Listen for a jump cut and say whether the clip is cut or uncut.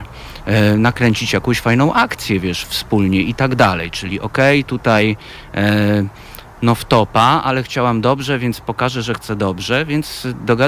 uncut